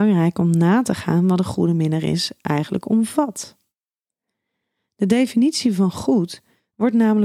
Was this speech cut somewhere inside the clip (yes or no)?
no